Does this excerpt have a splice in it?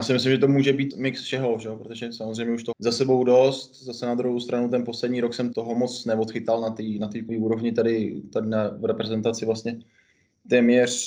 yes; 4 cuts; at 0.9 s, 2.7 s, 5.5 s, 7.3 s

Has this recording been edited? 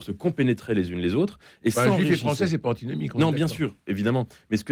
no; 0 cuts

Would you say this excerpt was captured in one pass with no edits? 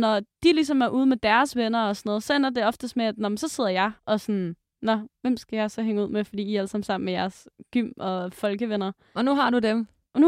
no; 1 cut; at 4.0 s

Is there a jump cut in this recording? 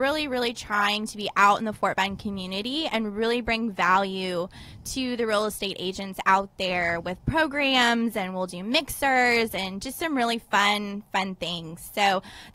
no; 0 cuts

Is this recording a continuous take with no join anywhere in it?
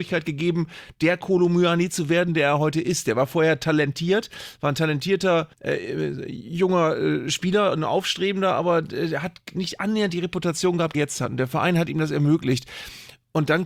no; 2 cuts; at 5.5 s, 10.9 s

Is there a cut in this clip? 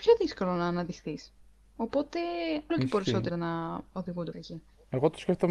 yes; 3 cuts; at 2.7 s, 3.3 s, 4.3 s

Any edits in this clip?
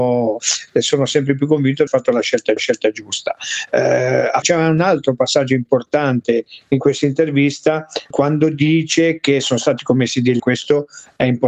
yes; 5 cuts; at 1.9 s, 2.6 s, 4.4 s, 8.1 s, 10.4 s

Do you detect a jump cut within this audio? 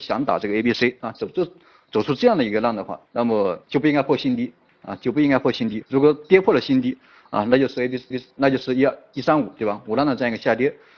yes; 4 cuts; at 3.1 s, 3.6 s, 5.8 s, 8.1 s

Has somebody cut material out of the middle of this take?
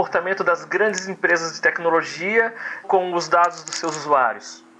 yes; 1 cut; at 2.8 s

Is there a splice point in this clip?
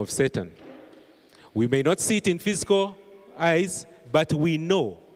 no; 0 cuts

